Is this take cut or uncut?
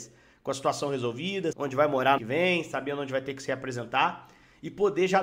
cut